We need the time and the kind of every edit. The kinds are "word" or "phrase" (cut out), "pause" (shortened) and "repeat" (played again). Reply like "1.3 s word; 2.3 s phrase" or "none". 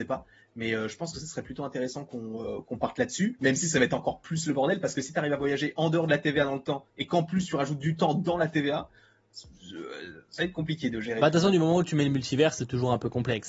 6.9 s pause